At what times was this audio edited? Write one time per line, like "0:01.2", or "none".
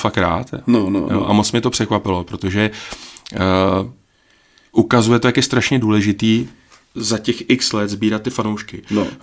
none